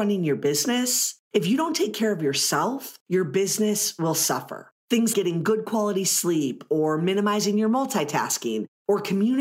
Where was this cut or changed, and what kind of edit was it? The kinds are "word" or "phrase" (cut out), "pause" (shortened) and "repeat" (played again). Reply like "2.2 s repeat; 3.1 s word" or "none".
5.1 s word